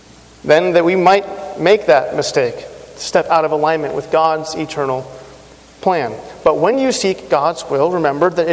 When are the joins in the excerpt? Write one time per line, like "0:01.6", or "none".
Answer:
none